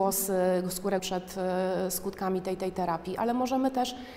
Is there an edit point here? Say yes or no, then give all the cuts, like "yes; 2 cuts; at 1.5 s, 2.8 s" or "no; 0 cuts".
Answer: yes; 2 cuts; at 1.0 s, 2.6 s